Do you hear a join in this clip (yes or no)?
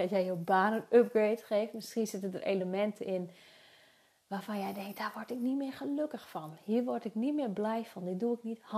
no